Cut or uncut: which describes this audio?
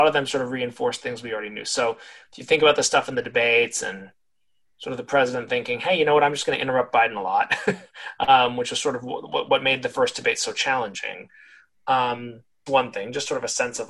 cut